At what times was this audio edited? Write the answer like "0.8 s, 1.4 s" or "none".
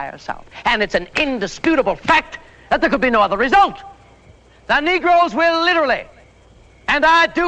none